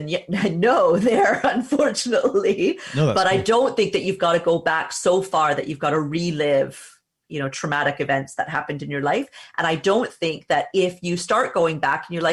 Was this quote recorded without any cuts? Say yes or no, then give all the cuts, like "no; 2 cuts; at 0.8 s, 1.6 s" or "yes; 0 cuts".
yes; 0 cuts